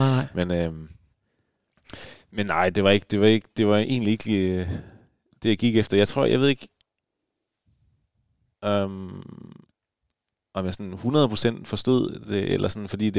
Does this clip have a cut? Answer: no; 0 cuts

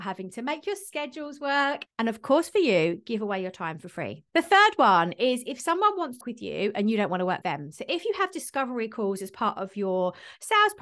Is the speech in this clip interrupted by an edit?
yes; 3 cuts; at 4.3 s, 6.2 s, 7.4 s

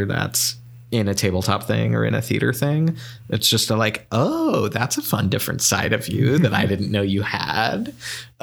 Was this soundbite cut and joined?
no; 0 cuts

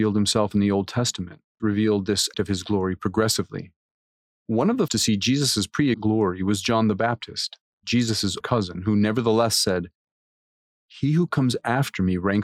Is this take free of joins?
no; 5 cuts; at 1.6 s, 2.3 s, 4.9 s, 5.9 s, 8.4 s

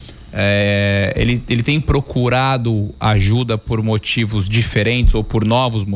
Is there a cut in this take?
no; 0 cuts

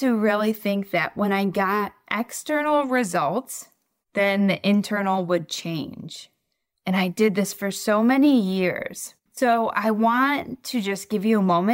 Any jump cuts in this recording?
yes; 1 cut; at 9.3 s

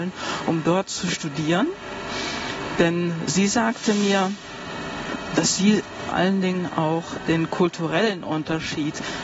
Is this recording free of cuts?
no; 1 cut; at 6.1 s

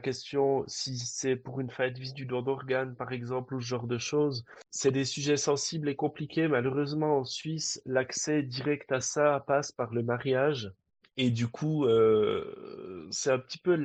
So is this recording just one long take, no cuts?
no; 2 cuts; at 4.7 s, 10.9 s

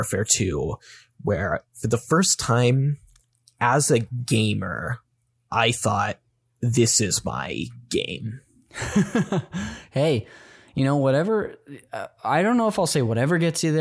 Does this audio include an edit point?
no; 0 cuts

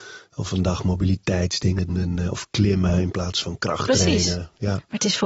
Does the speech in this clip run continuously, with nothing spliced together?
no; 1 cut; at 1.9 s

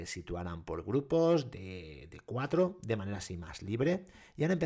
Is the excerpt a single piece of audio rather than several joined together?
yes; 0 cuts

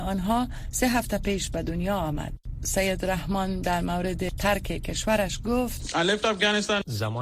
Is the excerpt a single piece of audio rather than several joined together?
yes; 0 cuts

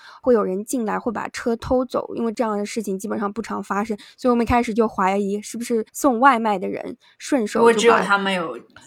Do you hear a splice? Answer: yes; 1 cut; at 5.9 s

